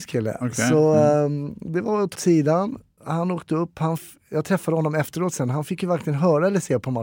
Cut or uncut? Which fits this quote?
cut